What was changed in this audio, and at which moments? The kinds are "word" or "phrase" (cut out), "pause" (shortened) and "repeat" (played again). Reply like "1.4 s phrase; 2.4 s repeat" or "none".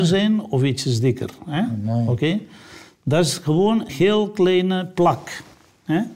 3.9 s word

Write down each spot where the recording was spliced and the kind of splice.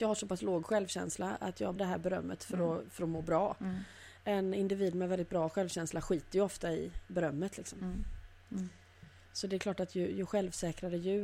1.8 s word

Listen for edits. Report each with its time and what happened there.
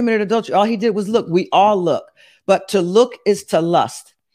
none

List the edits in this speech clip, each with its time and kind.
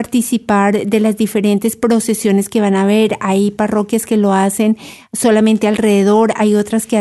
none

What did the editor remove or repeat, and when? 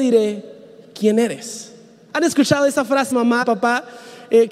3.1 s word; 3.4 s word

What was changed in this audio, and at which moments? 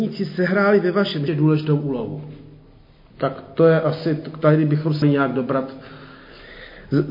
1.3 s word; 5.0 s word

